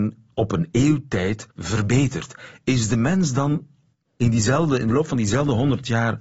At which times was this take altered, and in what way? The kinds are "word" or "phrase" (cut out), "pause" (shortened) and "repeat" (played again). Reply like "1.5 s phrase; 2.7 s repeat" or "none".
1.5 s pause; 3.9 s pause